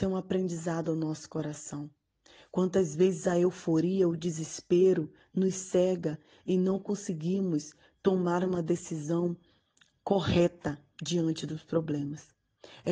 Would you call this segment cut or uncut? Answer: uncut